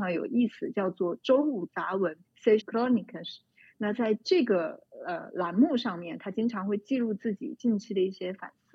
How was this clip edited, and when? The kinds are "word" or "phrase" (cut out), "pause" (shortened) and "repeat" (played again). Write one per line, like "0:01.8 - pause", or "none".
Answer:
0:02.2 - pause
0:02.6 - phrase